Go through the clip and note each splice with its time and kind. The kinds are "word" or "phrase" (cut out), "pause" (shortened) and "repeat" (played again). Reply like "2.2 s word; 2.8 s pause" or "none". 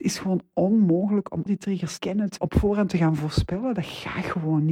1.5 s word; 2.0 s word; 2.4 s word